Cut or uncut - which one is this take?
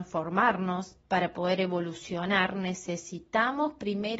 cut